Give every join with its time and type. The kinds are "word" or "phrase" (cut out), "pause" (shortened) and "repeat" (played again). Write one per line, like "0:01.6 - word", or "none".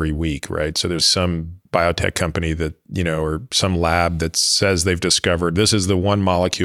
0:01.0 - word
0:01.7 - pause